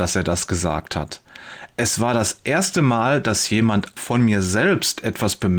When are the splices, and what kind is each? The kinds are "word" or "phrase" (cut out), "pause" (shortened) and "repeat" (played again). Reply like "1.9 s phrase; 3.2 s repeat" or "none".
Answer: 4.0 s word